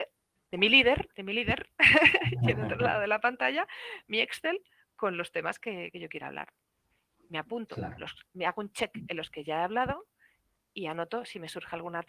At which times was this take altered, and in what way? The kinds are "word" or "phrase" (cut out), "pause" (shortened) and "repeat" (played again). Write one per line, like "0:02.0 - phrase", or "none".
none